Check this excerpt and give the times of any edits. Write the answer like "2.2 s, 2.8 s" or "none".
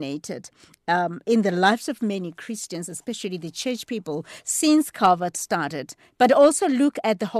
none